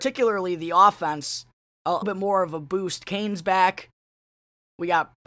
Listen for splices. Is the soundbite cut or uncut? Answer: cut